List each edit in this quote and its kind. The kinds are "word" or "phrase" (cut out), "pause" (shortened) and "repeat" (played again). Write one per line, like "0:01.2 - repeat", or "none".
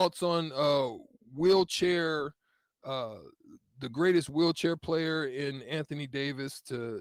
none

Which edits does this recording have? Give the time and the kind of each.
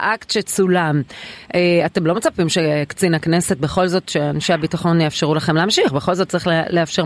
none

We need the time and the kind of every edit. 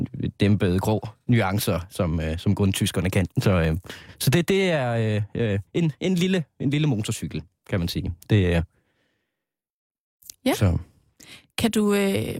0:03.3 - pause
0:05.7 - pause

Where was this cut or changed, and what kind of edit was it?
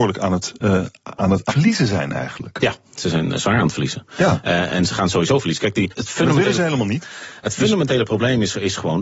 0:01.5 - word
0:05.9 - word

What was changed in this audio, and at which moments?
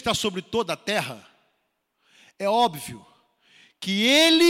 none

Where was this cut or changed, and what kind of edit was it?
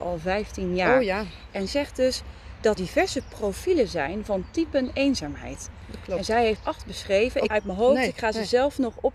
0:01.7 - word
0:02.8 - word
0:06.6 - word
0:07.5 - phrase

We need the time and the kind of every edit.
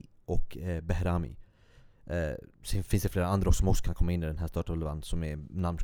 0:02.5 - pause

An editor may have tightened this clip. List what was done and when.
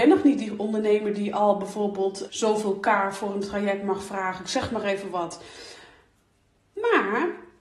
0:02.3 - word

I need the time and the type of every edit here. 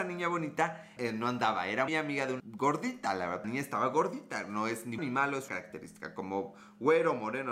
0:01.0 - word
0:01.9 - word
0:02.4 - word
0:03.4 - word
0:05.0 - word
0:05.5 - word

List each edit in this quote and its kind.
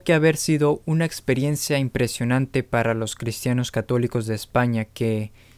none

